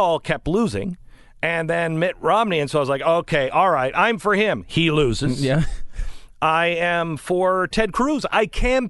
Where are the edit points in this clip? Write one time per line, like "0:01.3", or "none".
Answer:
none